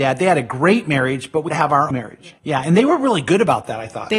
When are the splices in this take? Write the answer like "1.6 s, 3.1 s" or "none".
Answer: 1.5 s, 1.9 s, 2.4 s